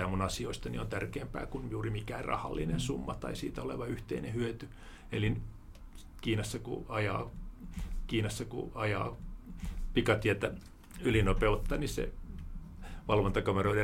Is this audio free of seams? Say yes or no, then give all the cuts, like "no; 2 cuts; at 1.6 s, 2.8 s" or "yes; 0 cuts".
no; 1 cut; at 8.1 s